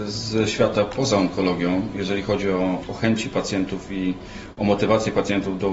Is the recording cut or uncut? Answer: uncut